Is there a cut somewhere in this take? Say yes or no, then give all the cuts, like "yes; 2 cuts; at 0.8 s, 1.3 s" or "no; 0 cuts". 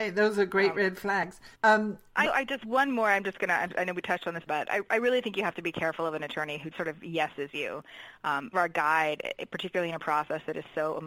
yes; 5 cuts; at 1.5 s, 2.2 s, 4.5 s, 6.7 s, 8.5 s